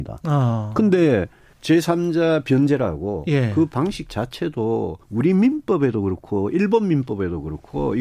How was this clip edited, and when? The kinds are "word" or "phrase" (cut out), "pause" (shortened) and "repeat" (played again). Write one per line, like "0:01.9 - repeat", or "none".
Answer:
0:01.5 - pause
0:05.0 - pause

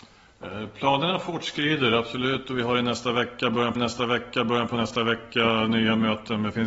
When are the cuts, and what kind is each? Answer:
0:03.8 - repeat

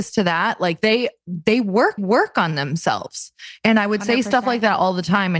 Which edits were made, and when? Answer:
0:02.0 - repeat

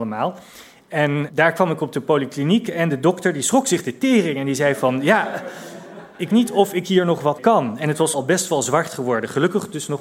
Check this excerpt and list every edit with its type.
0:06.3 - word
0:07.4 - word
0:08.1 - word

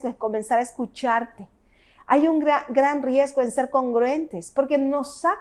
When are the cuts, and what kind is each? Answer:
none

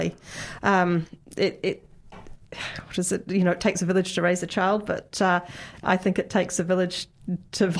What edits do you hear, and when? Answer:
none

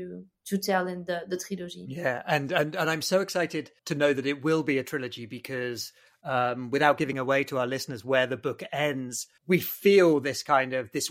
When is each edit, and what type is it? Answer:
0:03.8 - pause
0:07.1 - word
0:09.4 - pause

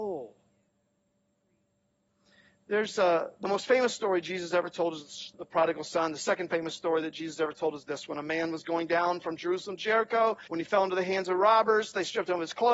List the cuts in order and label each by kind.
0:05.3 - word
0:10.5 - pause

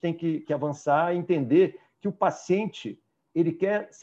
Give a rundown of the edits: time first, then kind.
none

